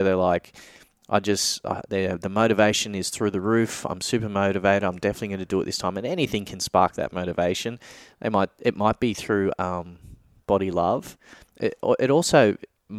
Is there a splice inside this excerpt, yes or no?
no